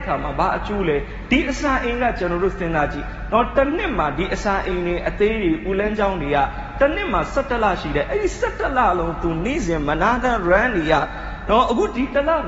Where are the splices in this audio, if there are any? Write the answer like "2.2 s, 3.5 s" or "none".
none